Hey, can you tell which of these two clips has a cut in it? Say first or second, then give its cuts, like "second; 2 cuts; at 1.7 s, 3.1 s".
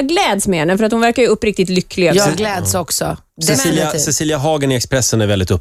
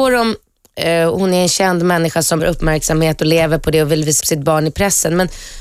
second; 2 cuts; at 2.4 s, 4.2 s